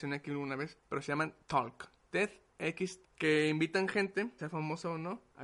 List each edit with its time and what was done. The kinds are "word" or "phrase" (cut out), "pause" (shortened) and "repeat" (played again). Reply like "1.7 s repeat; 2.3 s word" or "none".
1.4 s word; 3.0 s word; 4.4 s word